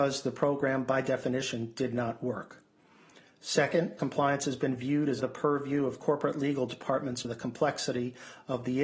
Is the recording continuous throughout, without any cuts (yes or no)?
no